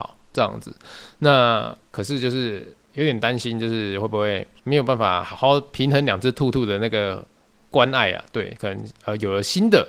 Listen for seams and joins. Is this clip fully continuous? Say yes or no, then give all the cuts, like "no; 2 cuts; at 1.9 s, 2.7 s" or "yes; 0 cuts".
yes; 0 cuts